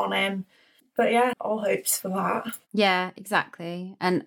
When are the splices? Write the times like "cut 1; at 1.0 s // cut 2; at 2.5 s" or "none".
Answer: cut 1; at 1.3 s